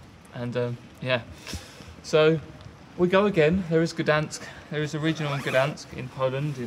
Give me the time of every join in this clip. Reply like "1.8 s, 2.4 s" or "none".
none